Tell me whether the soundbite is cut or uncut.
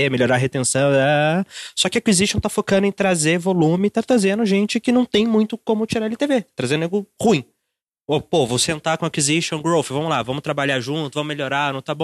uncut